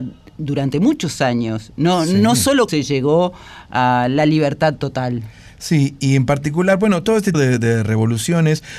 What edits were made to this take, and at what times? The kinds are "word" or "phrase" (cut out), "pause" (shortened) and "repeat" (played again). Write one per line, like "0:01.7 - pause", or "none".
0:02.7 - phrase
0:07.3 - word